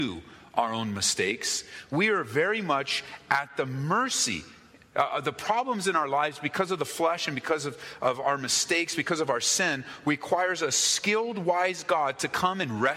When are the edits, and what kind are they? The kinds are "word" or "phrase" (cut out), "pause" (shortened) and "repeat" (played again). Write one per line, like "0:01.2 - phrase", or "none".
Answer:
none